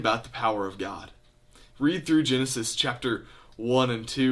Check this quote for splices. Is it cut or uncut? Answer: uncut